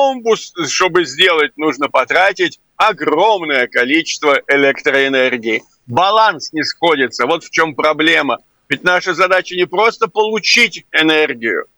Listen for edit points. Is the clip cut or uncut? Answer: uncut